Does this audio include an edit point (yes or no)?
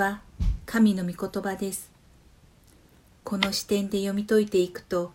no